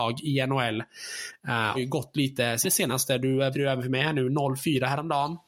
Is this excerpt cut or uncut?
cut